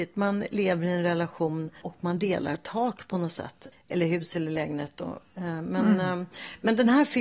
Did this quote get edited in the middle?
yes; 1 cut; at 1.8 s

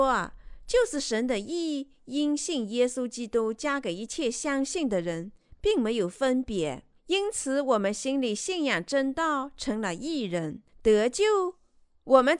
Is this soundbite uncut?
no; 1 cut; at 7.0 s

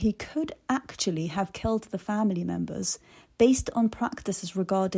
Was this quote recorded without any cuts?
yes; 0 cuts

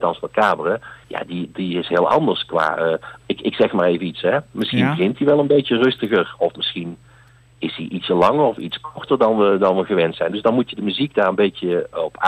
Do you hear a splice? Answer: yes; 1 cut; at 1.0 s

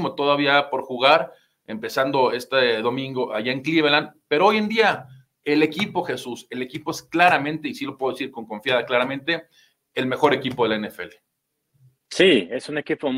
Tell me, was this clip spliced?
no; 0 cuts

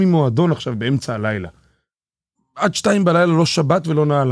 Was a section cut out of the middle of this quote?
no; 0 cuts

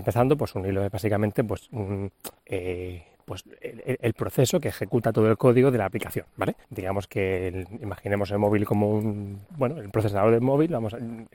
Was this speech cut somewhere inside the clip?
yes; 3 cuts; at 2.4 s, 6.6 s, 9.5 s

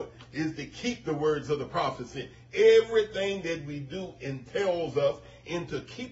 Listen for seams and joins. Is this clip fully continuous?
yes; 0 cuts

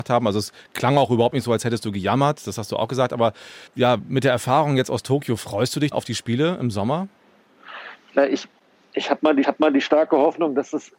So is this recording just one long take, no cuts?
no; 3 cuts; at 3.7 s, 5.9 s, 9.4 s

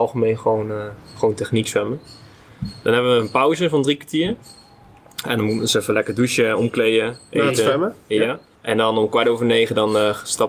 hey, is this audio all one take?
no; 1 cut; at 8.5 s

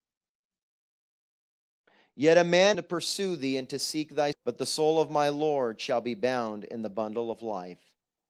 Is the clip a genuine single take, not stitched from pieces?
no; 2 cuts; at 2.7 s, 4.3 s

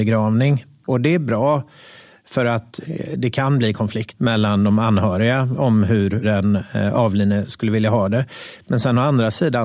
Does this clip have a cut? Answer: no; 0 cuts

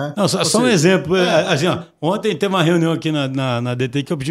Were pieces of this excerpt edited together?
no; 0 cuts

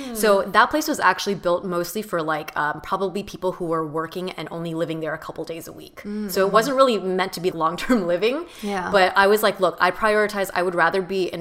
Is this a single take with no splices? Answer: no; 1 cut; at 7.5 s

